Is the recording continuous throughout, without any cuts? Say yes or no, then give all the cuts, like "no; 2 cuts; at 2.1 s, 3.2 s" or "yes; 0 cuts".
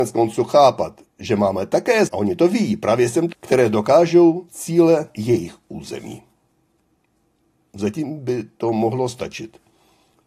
no; 4 cuts; at 2.1 s, 3.3 s, 4.5 s, 5.1 s